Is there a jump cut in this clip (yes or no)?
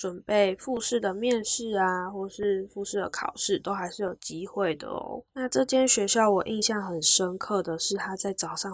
yes